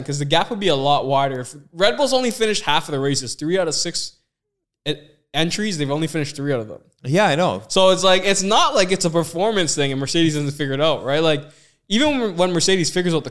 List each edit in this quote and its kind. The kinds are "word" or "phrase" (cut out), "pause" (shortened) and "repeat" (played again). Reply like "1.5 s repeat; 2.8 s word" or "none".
none